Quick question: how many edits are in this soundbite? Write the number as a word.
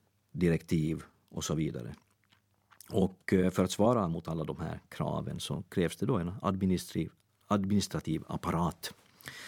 zero